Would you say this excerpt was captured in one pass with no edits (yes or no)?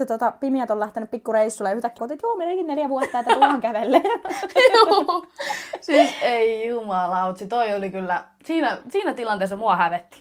no